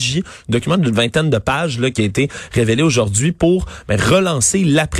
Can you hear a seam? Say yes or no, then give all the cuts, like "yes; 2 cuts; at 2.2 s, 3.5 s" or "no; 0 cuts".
no; 0 cuts